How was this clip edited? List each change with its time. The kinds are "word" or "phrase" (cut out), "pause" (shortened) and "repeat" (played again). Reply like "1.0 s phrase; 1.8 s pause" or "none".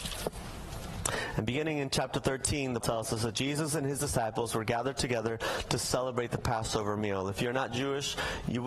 2.8 s word